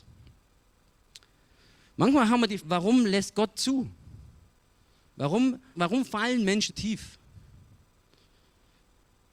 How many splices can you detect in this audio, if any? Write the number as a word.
four